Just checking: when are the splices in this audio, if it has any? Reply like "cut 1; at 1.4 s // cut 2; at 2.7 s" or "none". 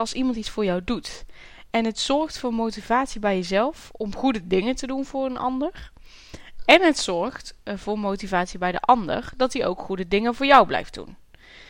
none